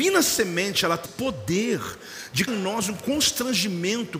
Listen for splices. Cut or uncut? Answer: cut